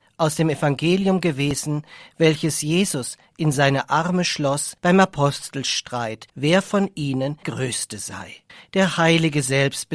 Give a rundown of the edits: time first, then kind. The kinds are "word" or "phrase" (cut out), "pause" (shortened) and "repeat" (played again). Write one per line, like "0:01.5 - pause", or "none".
0:04.8 - pause
0:06.3 - pause
0:07.4 - word
0:08.5 - pause